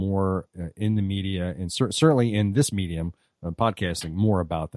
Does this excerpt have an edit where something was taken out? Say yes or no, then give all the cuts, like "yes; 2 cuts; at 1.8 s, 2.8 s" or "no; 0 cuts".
no; 0 cuts